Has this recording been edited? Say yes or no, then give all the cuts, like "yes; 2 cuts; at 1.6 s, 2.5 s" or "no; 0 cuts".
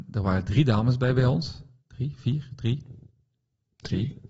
no; 0 cuts